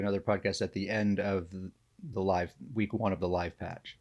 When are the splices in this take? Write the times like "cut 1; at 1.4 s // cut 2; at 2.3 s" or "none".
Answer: cut 1; at 2.1 s